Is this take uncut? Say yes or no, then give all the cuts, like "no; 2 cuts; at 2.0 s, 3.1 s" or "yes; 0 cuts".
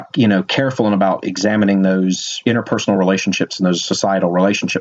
yes; 0 cuts